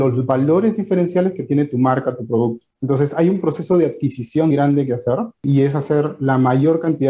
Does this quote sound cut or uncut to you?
cut